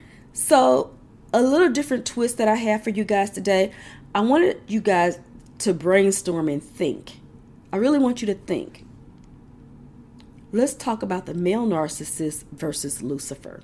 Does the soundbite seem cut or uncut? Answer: uncut